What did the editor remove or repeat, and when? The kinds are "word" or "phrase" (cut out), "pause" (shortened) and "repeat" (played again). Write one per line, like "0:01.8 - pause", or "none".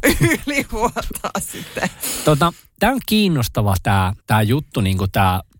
0:04.2 - pause